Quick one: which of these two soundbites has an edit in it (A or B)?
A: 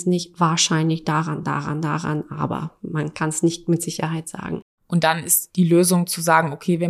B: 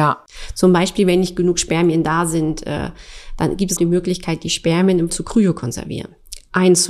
B